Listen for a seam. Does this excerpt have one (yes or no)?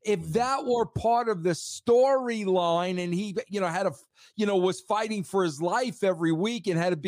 no